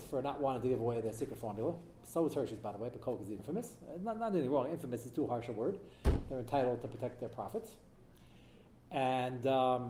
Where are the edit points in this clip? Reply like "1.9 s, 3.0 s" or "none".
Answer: 3.4 s